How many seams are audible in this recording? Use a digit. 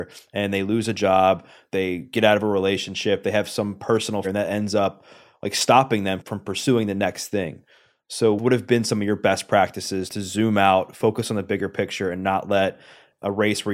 1